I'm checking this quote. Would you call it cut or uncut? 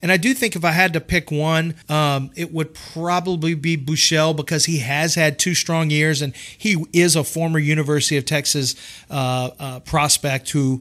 cut